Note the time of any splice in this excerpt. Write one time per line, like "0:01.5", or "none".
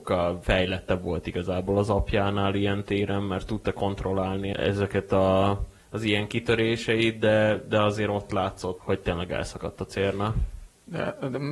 0:05.8
0:08.8